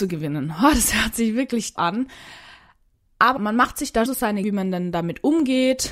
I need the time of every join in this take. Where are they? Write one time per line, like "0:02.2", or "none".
0:01.8
0:03.4
0:04.1
0:04.4